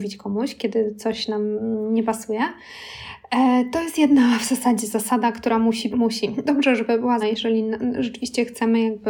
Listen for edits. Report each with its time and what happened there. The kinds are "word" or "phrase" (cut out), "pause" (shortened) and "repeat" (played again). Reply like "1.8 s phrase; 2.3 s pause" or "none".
5.9 s word; 7.2 s word